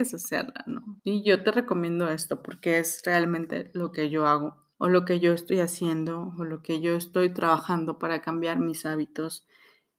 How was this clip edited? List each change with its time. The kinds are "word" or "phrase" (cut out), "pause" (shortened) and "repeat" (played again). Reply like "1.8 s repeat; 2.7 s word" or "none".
1.0 s pause; 4.7 s pause